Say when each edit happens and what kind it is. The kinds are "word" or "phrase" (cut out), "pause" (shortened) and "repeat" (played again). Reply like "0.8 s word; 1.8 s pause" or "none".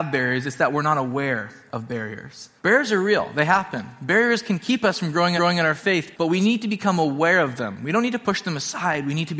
2.6 s pause; 5.4 s repeat; 6.1 s word